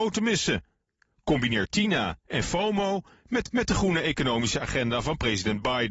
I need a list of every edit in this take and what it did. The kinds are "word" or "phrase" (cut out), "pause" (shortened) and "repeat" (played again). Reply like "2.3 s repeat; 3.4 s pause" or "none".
3.4 s repeat